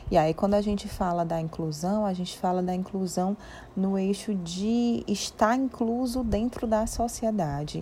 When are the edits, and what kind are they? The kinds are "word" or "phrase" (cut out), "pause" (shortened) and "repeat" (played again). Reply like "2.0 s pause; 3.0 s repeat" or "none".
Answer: none